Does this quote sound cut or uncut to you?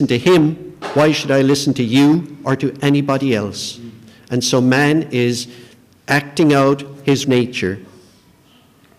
cut